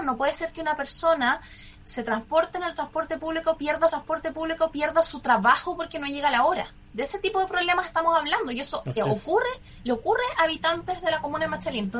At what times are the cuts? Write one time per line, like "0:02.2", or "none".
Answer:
0:01.8
0:03.9